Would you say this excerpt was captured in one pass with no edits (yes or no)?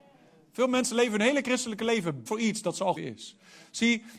no